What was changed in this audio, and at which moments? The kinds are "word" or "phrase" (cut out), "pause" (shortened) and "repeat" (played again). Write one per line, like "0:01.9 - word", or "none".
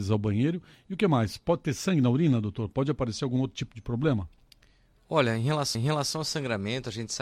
0:05.7 - repeat